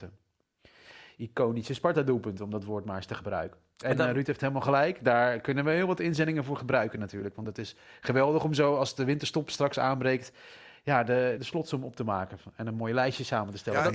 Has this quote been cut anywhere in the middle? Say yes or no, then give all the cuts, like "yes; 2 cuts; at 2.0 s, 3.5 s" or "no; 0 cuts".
yes; 1 cut; at 11.4 s